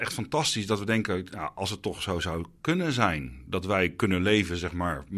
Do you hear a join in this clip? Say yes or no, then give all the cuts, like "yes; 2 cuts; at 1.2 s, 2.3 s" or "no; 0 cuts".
no; 0 cuts